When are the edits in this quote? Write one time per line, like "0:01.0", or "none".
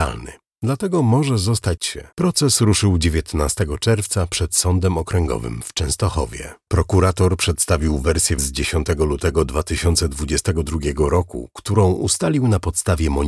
0:01.8
0:02.1
0:08.4